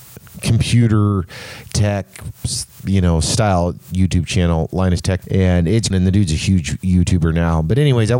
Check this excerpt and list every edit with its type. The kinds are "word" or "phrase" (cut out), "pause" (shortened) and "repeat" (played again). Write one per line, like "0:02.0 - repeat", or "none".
0:01.7 - word
0:05.2 - word
0:05.9 - word